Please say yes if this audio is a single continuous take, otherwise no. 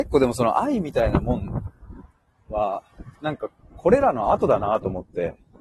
no